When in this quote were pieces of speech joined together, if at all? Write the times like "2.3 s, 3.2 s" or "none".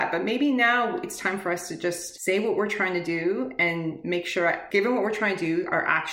none

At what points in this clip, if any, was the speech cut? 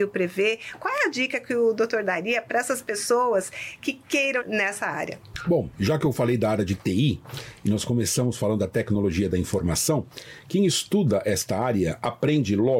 4.4 s

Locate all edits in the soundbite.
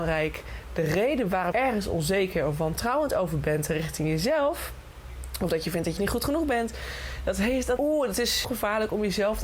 1.5 s, 6.0 s, 7.8 s, 8.4 s

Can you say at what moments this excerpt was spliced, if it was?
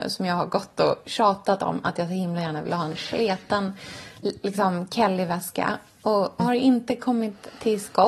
6.4 s

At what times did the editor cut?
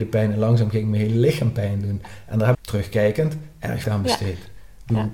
2.5 s, 3.8 s

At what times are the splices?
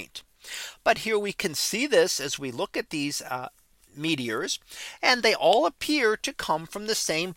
none

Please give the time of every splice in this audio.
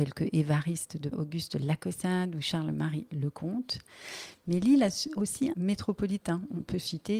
1.1 s, 5.5 s

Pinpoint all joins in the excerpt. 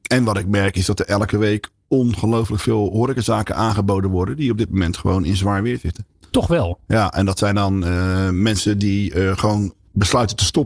none

